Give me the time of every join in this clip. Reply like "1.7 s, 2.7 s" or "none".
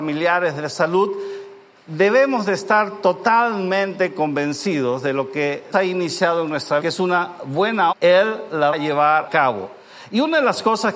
5.7 s, 6.8 s, 7.9 s, 8.7 s, 9.3 s